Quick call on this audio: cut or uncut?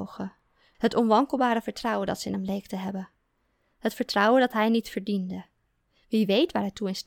uncut